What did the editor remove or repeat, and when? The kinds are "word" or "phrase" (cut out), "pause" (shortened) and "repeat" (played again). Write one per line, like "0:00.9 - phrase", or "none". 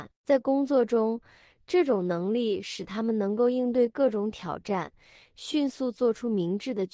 none